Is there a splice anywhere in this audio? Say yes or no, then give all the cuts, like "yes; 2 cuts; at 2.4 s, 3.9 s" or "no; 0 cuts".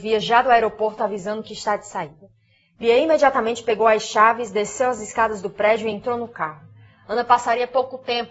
no; 0 cuts